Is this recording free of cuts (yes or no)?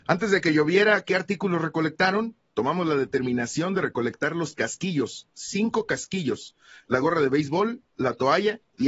no